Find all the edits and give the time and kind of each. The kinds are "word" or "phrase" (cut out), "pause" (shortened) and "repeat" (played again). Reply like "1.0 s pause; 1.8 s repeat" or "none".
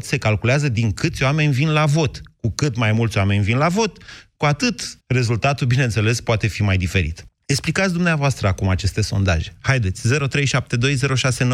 5.0 s pause; 7.3 s pause